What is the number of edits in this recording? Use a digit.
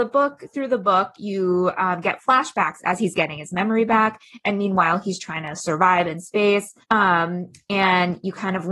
1